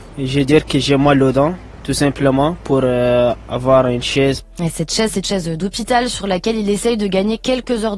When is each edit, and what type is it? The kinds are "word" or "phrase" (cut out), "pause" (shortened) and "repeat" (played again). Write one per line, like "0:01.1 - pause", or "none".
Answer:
0:05.2 - word